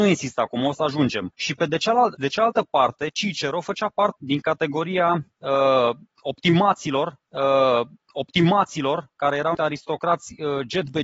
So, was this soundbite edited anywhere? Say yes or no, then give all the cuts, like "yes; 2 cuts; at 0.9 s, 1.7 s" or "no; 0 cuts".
yes; 5 cuts; at 1.3 s, 2.1 s, 4.2 s, 7.2 s, 9.5 s